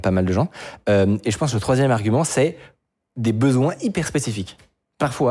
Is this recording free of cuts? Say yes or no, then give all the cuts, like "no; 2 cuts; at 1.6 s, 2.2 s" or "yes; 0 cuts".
yes; 0 cuts